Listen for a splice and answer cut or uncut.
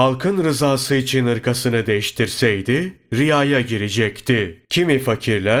cut